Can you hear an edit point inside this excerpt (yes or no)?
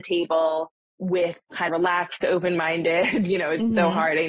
yes